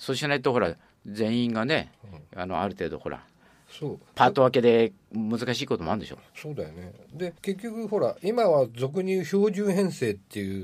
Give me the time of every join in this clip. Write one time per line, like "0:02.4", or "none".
0:04.1
0:06.3
0:07.4